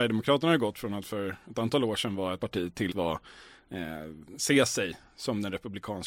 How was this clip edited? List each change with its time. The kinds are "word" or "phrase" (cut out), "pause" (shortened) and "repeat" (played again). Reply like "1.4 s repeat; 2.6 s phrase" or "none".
2.4 s phrase; 2.9 s word

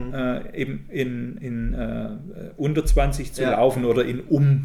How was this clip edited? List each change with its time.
none

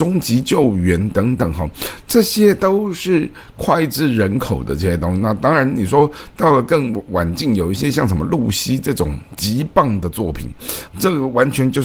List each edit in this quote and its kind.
10.9 s word

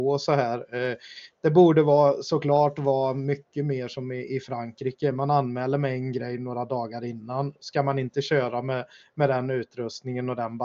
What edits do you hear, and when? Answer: none

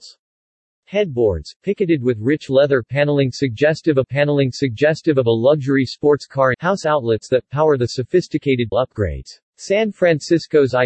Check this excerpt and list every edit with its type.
4.0 s repeat; 6.5 s word; 8.7 s word; 9.5 s pause

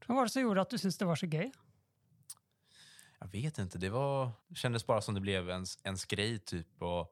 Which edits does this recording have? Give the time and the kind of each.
4.4 s pause

